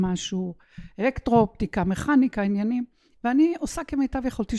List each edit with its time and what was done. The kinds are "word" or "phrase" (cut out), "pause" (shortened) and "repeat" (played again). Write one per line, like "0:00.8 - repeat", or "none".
none

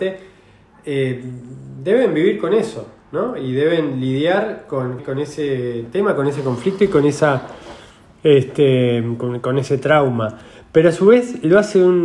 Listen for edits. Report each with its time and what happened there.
0:05.0 - word

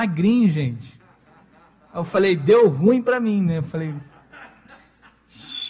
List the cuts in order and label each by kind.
none

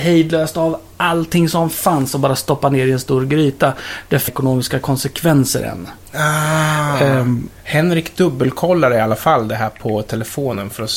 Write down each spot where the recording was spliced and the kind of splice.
0:04.3 - phrase
0:07.6 - pause

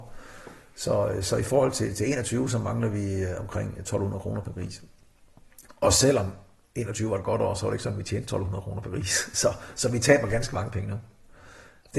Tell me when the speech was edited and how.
none

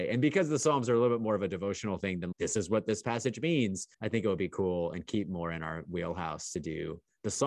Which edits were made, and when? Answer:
0:02.3 - word
0:03.9 - pause

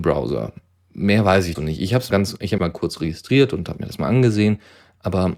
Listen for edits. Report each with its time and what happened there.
0:01.5 - word
0:02.1 - word
0:02.6 - word

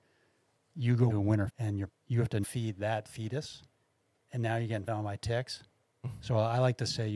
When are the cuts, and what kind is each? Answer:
0:01.1 - word
0:01.5 - word
0:01.9 - word
0:02.4 - word
0:04.9 - word

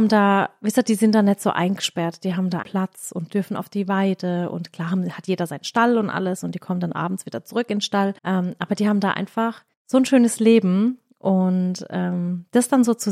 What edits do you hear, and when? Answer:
0:02.6 - word
0:08.2 - pause
0:09.7 - pause

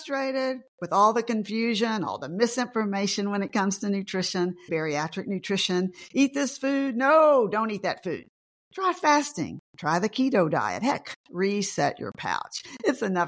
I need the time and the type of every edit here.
0:04.7 - word
0:11.2 - word

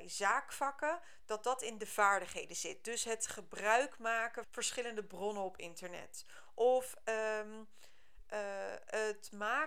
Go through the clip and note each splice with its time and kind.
0:04.4 - word

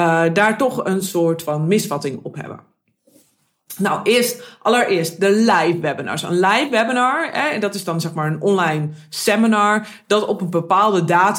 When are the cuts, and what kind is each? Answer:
none

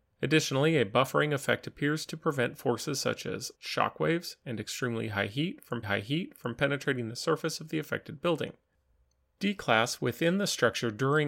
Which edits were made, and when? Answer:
0:03.5 - pause
0:05.8 - repeat

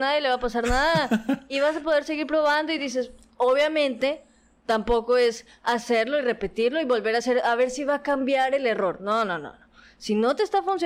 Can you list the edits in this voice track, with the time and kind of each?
none

